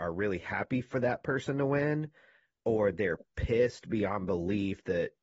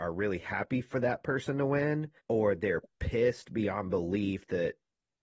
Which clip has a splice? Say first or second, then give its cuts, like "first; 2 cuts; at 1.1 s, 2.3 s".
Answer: second; 1 cut; at 2.2 s